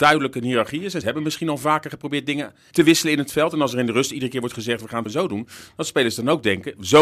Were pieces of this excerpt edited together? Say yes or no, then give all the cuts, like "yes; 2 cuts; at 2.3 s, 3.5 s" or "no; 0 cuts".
yes; 3 cuts; at 1.0 s, 2.7 s, 5.1 s